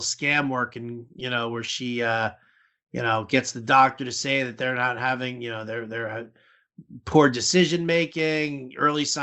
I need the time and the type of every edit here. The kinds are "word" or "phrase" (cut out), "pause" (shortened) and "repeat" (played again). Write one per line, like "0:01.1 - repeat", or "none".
none